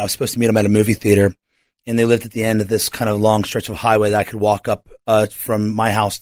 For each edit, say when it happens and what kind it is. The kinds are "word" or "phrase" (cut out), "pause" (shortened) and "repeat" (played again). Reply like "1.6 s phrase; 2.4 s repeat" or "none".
none